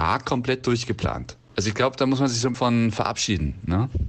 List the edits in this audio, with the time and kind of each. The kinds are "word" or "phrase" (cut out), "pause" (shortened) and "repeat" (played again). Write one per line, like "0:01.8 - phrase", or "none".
0:01.4 - pause
0:02.5 - word